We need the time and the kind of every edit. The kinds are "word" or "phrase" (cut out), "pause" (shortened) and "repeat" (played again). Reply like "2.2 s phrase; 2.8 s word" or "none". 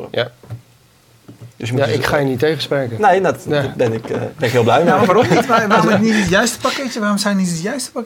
1.5 s pause